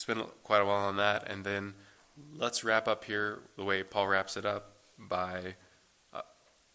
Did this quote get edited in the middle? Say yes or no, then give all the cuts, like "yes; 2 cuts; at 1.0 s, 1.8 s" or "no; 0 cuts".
no; 0 cuts